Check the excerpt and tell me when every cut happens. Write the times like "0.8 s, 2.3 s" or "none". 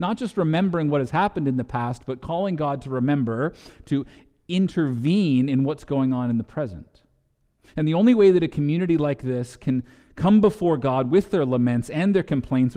none